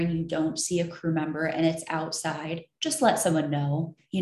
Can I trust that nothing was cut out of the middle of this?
yes; 0 cuts

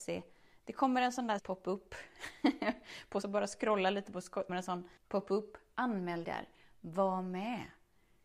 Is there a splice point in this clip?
yes; 5 cuts; at 1.4 s, 3.2 s, 4.5 s, 5.0 s, 6.2 s

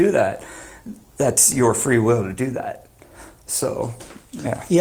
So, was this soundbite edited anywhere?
no; 0 cuts

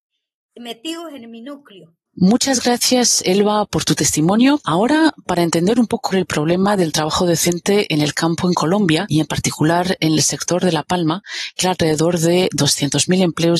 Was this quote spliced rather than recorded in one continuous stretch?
yes; 2 cuts; at 6.1 s, 11.6 s

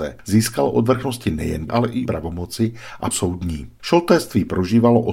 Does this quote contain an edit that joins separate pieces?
yes; 3 cuts; at 1.7 s, 2.1 s, 3.1 s

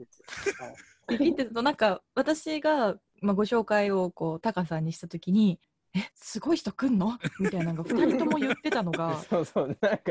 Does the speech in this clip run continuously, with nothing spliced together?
no; 3 cuts; at 3.1 s, 5.6 s, 6.1 s

